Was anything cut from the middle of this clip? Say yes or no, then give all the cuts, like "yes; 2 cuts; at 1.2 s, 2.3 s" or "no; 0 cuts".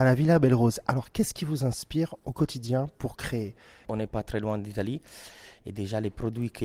no; 0 cuts